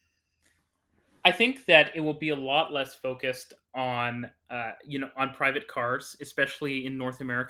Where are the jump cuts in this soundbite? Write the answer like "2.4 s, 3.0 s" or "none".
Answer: none